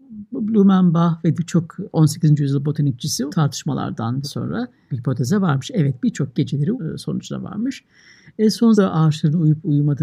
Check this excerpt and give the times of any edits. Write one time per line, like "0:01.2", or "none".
0:01.4
0:03.3
0:04.2
0:04.9
0:06.3
0:06.7
0:08.7